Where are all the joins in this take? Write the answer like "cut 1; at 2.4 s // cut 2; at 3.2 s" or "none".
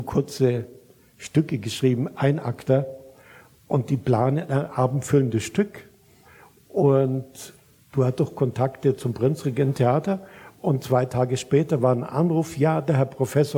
none